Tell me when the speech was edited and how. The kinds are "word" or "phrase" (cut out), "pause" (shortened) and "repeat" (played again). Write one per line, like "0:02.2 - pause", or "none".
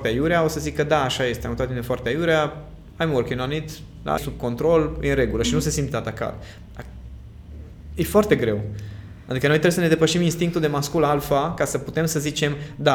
0:04.2 - word

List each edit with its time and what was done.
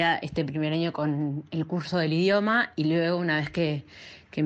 none

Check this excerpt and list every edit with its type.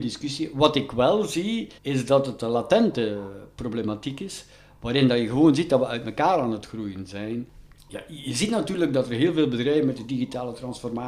0:01.8 - pause

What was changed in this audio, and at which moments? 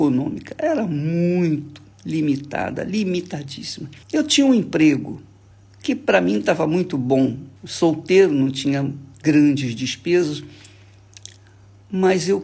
0:04.0 - pause
0:05.5 - pause
0:07.6 - pause

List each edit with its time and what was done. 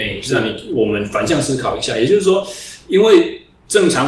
none

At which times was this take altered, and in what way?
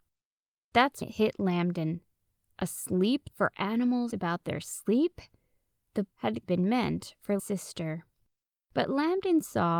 0:01.0 - word
0:03.3 - word
0:04.1 - word
0:06.1 - word
0:06.4 - word
0:07.4 - word

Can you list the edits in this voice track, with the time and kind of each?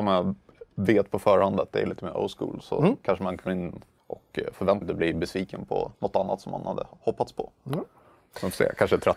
0:03.5 - word
0:04.0 - pause
0:04.8 - phrase
0:05.9 - pause

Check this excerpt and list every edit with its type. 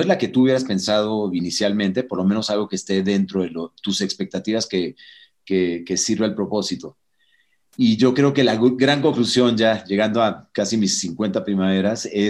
none

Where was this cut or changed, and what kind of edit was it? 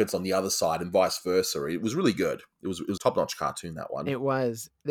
0:03.0 - word

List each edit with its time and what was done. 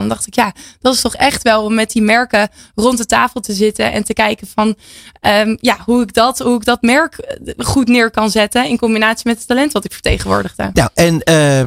none

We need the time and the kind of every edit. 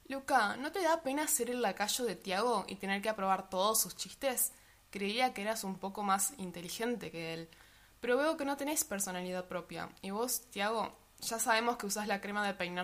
none

